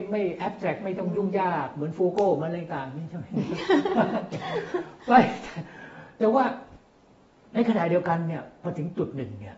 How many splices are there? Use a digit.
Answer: 0